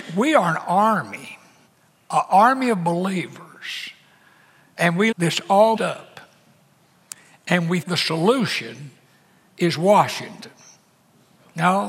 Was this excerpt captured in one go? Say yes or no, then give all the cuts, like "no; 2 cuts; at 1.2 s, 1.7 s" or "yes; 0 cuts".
no; 4 cuts; at 1.7 s, 5.1 s, 5.8 s, 7.8 s